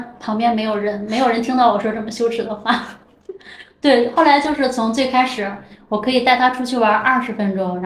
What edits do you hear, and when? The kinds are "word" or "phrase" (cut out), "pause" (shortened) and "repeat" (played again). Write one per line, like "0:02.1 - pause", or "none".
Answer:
none

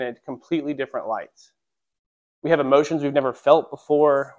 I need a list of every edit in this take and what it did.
none

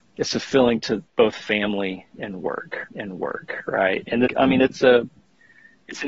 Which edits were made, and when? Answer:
0:02.9 - repeat
0:04.3 - word

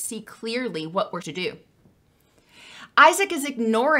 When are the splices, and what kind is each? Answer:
0:01.2 - word

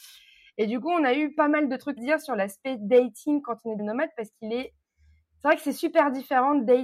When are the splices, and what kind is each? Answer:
0:02.0 - word
0:03.8 - word

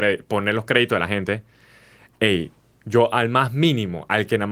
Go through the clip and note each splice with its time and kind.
none

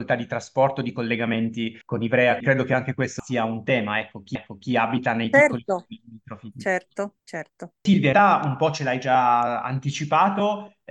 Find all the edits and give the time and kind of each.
0:01.8 - pause
0:02.4 - word
0:04.4 - repeat
0:07.2 - pause
0:08.1 - word

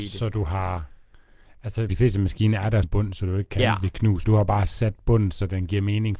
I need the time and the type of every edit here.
0:01.9 - word
0:02.8 - word
0:04.2 - word

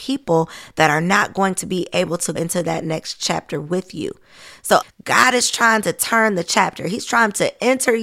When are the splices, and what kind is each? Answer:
0:02.4 - word
0:04.8 - word

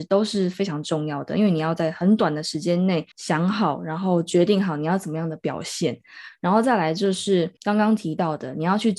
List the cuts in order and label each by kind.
0:03.1 - pause
0:07.6 - pause

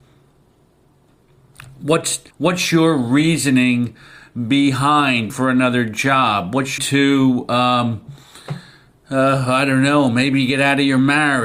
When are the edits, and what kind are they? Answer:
0:02.3 - pause
0:05.3 - word
0:06.8 - phrase

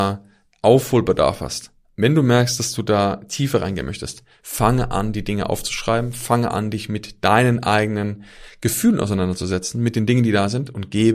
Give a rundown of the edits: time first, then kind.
none

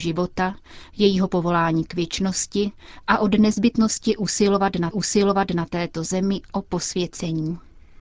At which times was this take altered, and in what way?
0:04.9 - repeat

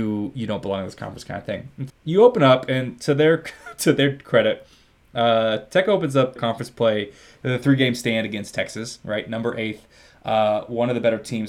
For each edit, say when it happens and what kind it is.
0:01.9 - word
0:06.4 - word

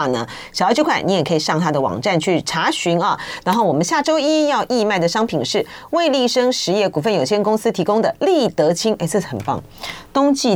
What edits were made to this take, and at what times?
none

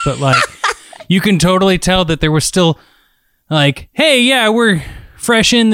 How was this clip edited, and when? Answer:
none

